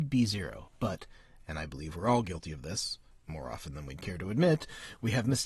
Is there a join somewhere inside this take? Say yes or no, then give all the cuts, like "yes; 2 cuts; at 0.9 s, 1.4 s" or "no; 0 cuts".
no; 0 cuts